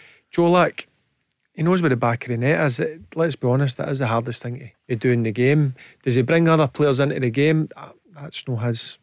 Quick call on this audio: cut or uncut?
cut